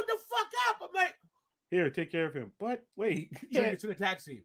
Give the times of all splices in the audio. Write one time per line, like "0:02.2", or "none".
0:02.9
0:03.5